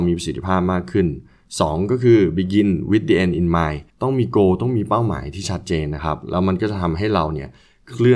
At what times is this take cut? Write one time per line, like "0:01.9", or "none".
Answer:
0:03.9